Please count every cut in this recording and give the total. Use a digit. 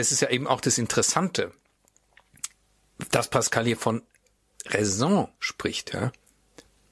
1